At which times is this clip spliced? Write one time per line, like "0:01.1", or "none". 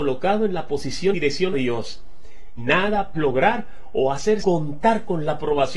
0:01.1
0:01.5
0:02.6
0:03.1
0:04.4